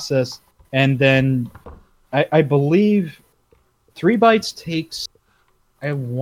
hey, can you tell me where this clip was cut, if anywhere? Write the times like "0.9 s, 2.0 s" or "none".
none